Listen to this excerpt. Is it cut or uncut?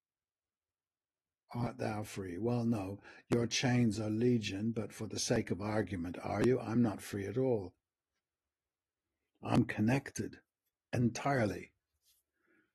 uncut